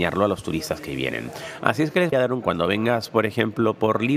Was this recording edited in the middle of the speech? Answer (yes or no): yes